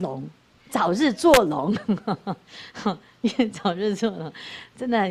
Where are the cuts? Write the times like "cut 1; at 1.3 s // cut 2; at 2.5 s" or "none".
none